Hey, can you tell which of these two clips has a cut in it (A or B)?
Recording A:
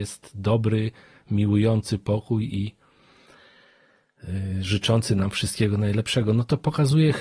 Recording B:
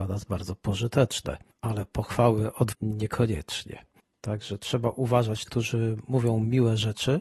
B